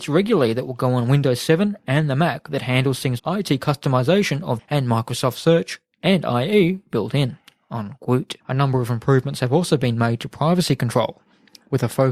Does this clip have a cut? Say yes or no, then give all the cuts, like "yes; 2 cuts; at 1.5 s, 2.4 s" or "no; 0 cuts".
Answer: yes; 3 cuts; at 3.2 s, 4.6 s, 8.4 s